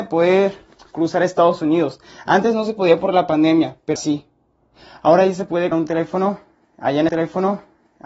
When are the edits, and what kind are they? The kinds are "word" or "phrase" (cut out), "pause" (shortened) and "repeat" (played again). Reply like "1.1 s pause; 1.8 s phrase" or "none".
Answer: 4.0 s word; 5.7 s word; 7.1 s repeat